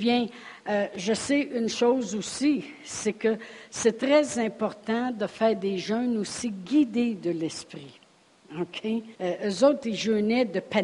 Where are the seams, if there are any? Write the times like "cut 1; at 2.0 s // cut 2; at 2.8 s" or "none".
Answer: cut 1; at 9.1 s